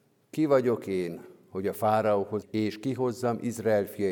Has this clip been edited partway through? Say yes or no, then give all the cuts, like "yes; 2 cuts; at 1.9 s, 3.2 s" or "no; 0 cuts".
yes; 1 cut; at 2.4 s